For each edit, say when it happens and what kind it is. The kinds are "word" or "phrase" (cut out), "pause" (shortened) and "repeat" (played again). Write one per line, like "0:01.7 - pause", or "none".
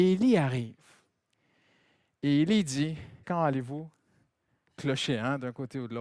0:03.2 - word